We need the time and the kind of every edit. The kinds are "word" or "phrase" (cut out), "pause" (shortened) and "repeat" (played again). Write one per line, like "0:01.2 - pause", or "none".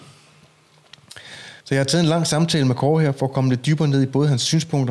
0:01.6 - pause

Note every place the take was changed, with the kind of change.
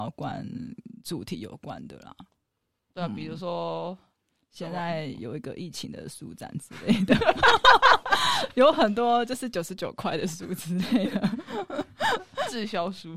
none

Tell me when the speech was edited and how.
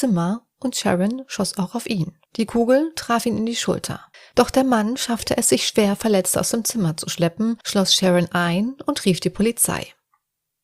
0:02.3 - pause
0:04.1 - pause
0:07.6 - pause

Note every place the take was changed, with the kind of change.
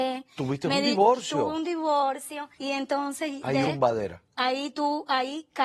0:02.6 - pause
0:03.6 - word

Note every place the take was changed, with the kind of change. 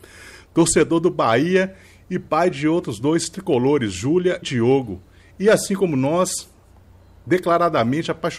0:04.4 - word

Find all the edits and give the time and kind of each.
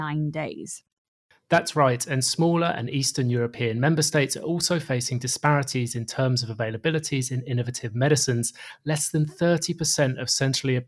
none

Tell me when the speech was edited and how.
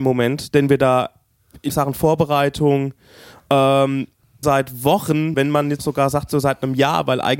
0:01.7 - word
0:04.4 - word
0:05.3 - word
0:05.8 - word
0:06.3 - word

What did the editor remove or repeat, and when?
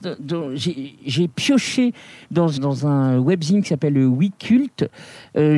0:02.6 - word

